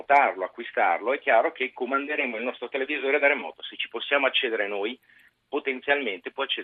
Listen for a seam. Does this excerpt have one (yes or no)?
no